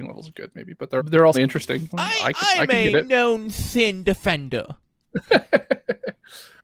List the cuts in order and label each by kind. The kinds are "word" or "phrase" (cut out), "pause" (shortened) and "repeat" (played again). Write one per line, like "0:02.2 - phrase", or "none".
0:01.0 - word
0:01.3 - word
0:01.9 - word
0:02.9 - word